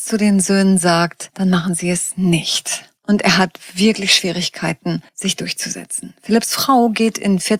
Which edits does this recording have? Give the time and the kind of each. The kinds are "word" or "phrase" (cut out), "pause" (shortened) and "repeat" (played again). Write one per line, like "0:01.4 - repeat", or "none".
0:03.0 - pause
0:05.1 - pause